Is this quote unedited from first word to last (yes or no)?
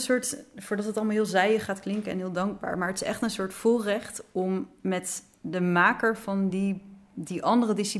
yes